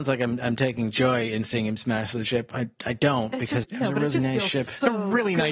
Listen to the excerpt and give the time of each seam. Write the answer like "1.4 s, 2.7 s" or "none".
3.6 s